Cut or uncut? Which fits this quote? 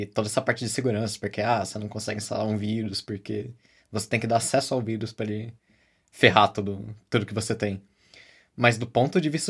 uncut